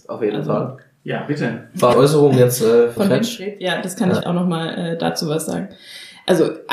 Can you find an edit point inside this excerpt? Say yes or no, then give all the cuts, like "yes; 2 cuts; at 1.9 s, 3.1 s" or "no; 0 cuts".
yes; 3 cuts; at 1.9 s, 3.0 s, 4.2 s